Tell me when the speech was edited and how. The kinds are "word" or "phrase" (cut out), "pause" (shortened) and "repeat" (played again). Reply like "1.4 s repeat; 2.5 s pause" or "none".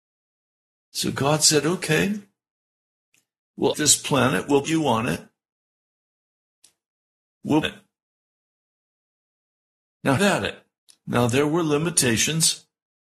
3.7 s word; 4.6 s word; 7.6 s phrase; 10.2 s word; 10.8 s pause